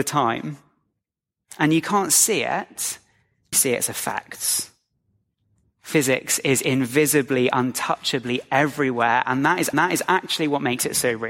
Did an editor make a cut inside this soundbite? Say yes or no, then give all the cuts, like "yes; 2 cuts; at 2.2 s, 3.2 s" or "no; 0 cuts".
yes; 2 cuts; at 3.5 s, 9.7 s